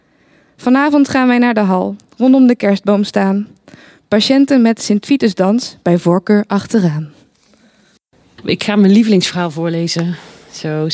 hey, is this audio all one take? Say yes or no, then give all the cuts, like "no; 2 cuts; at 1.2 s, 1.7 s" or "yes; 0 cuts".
yes; 0 cuts